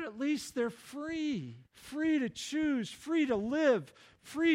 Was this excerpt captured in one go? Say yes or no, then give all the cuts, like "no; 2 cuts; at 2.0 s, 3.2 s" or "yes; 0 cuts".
no; 1 cut; at 1.6 s